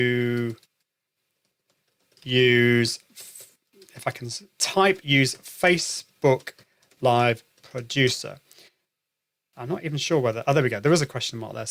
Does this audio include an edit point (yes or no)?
no